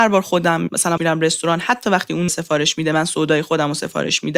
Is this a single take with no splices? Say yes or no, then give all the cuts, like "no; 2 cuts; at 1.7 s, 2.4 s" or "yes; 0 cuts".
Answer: no; 2 cuts; at 1.0 s, 2.3 s